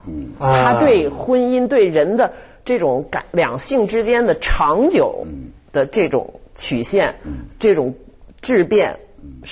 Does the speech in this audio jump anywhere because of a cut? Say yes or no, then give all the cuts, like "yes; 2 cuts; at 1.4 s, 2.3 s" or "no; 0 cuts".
no; 0 cuts